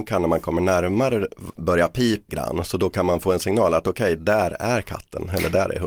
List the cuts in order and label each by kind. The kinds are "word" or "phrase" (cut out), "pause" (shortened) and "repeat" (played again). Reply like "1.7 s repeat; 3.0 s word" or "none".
1.6 s word; 2.3 s word